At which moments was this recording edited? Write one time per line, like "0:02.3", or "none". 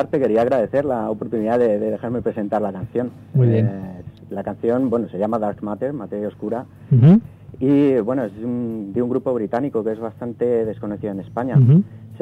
none